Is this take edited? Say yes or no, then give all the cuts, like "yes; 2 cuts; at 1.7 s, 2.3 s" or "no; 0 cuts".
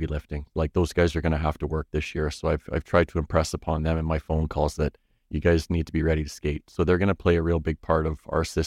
no; 0 cuts